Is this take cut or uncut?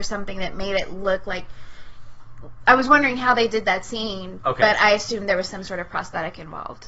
uncut